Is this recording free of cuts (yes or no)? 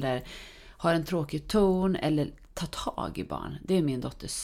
yes